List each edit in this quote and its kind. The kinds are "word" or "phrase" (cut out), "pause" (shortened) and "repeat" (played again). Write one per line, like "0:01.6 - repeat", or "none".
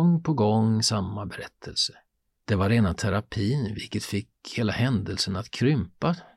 none